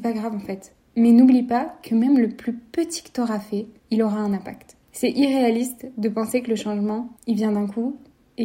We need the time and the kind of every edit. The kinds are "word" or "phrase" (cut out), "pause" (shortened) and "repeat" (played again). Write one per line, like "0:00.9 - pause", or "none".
0:03.8 - pause
0:04.8 - pause
0:07.2 - pause